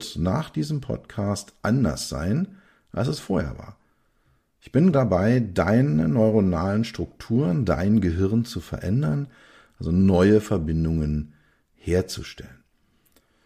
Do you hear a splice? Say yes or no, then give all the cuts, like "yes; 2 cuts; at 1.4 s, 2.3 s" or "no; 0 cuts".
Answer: yes; 1 cut; at 4.9 s